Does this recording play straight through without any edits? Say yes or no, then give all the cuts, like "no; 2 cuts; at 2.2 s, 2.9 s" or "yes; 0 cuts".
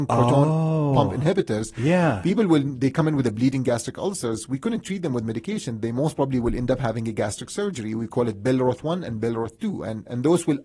yes; 0 cuts